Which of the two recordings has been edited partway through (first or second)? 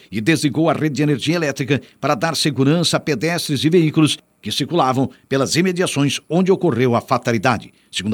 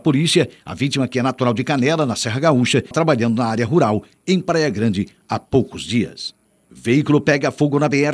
second